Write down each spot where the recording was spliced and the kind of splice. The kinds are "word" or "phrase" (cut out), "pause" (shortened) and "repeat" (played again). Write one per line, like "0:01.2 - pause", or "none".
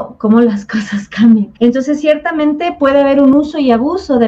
0:01.6 - pause